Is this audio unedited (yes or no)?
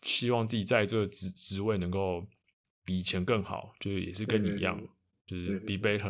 yes